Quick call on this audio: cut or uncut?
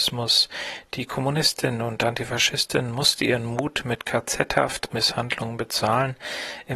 cut